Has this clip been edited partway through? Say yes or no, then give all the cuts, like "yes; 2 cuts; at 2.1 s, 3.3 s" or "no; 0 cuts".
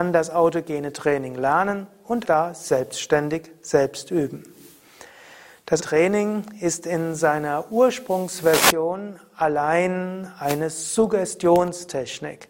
yes; 2 cuts; at 2.2 s, 5.8 s